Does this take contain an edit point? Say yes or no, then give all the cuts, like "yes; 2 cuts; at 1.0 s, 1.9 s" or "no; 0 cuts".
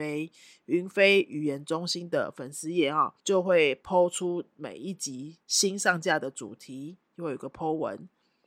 yes; 2 cuts; at 3.2 s, 5.4 s